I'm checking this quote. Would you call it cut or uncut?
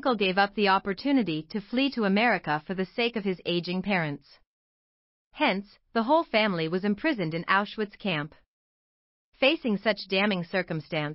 uncut